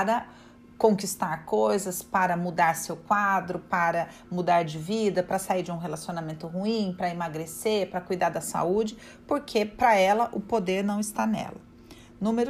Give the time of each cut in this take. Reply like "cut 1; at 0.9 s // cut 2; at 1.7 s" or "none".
none